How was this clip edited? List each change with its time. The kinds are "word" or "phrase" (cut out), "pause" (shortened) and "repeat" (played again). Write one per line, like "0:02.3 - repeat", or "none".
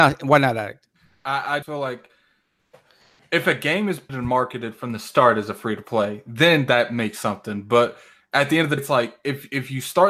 0:01.6 - word
0:04.1 - word
0:08.8 - word